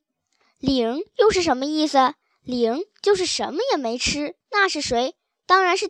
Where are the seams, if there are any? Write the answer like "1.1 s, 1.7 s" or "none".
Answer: 2.2 s, 4.4 s